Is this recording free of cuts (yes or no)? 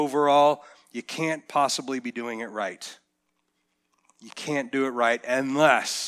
yes